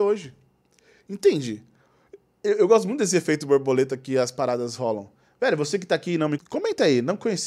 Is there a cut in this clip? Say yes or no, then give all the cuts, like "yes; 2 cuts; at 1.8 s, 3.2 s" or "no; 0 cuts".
yes; 1 cut; at 6.4 s